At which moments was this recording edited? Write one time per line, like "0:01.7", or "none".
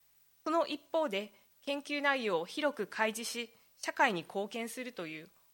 none